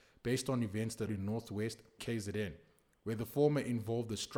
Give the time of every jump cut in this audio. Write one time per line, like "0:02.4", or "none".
0:01.1
0:02.0